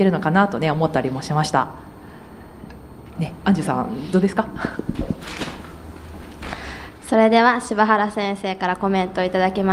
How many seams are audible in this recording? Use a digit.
0